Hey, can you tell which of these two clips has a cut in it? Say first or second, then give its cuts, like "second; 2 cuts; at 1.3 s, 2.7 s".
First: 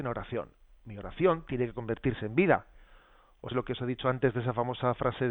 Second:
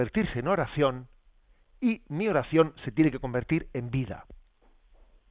first; 1 cut; at 3.5 s